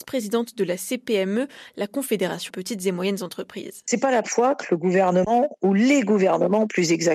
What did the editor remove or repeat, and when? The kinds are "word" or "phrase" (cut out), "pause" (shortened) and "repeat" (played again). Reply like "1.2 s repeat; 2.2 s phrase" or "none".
2.5 s word; 4.2 s word